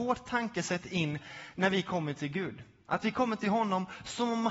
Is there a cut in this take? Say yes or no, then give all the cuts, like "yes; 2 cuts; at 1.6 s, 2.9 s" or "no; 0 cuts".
no; 0 cuts